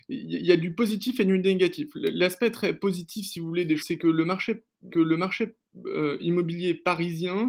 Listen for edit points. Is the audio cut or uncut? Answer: cut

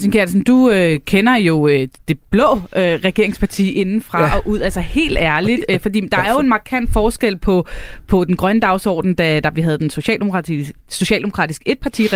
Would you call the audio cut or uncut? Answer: cut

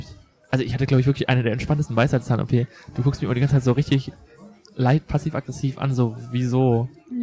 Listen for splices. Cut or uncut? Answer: cut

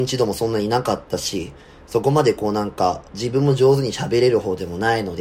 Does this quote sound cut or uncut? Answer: cut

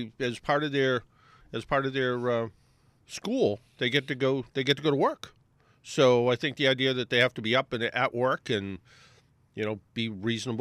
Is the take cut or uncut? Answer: uncut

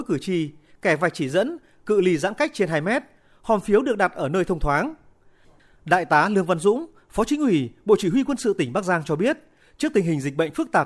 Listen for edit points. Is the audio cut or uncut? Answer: uncut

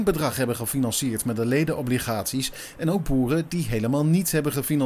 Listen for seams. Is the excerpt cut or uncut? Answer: uncut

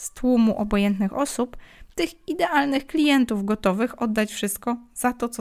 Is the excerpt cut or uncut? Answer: uncut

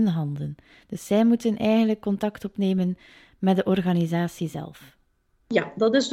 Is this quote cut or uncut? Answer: uncut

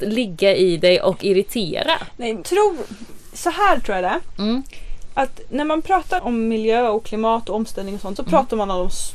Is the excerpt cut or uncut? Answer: cut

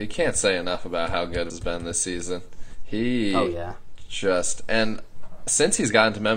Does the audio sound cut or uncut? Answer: cut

